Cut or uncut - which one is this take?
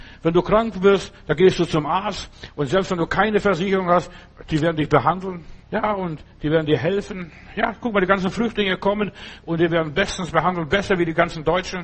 cut